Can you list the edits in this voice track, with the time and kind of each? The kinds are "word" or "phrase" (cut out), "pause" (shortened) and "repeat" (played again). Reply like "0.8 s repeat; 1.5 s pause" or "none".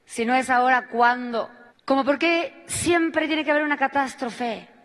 1.7 s pause